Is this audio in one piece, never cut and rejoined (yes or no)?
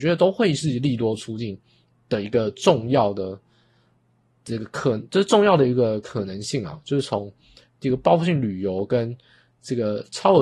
yes